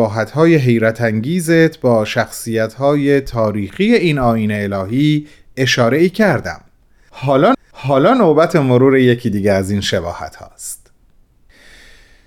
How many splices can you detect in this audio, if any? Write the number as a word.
one